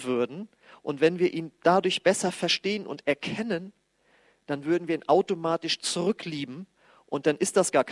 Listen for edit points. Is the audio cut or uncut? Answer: uncut